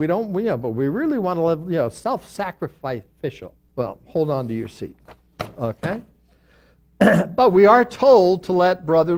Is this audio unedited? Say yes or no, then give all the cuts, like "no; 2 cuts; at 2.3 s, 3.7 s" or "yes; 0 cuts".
no; 1 cut; at 3.7 s